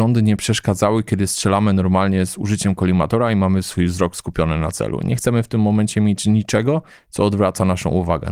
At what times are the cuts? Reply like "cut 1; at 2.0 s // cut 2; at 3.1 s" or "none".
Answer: none